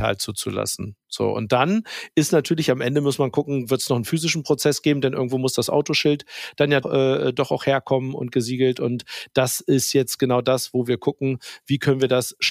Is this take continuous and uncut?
no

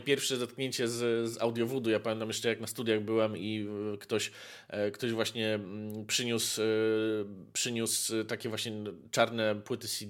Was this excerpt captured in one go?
yes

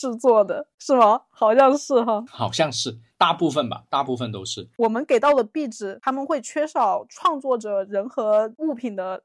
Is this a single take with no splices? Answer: no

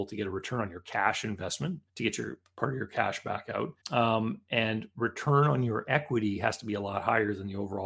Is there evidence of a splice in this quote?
yes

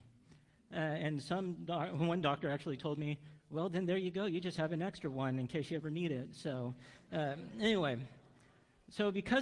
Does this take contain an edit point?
no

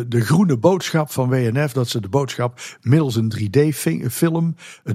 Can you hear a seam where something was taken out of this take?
no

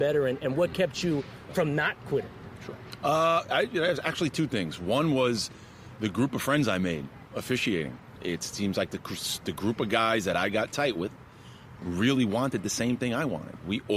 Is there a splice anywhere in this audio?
no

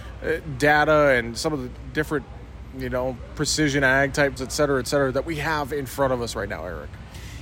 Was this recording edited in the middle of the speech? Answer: yes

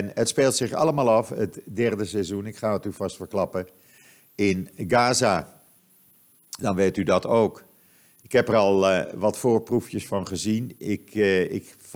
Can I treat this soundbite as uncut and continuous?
yes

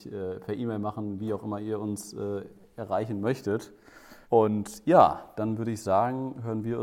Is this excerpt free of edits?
no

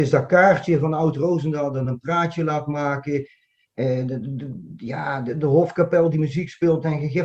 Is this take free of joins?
yes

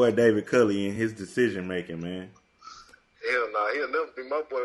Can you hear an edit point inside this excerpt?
no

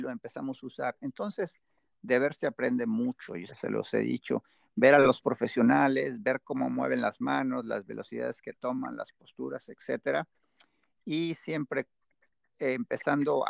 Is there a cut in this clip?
yes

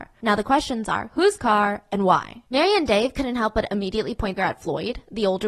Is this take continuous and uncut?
no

